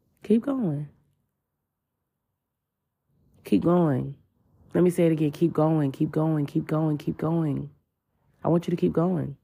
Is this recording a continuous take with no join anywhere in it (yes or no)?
yes